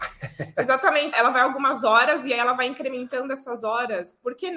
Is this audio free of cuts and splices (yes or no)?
no